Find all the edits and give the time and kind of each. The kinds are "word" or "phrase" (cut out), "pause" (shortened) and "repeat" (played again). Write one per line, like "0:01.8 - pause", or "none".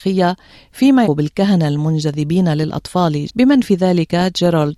0:01.0 - word
0:03.3 - word